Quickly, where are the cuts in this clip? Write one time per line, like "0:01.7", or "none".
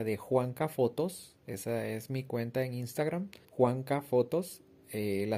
0:03.4